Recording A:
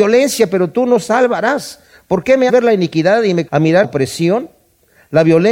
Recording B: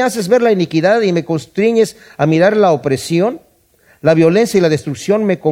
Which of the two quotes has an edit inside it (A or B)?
A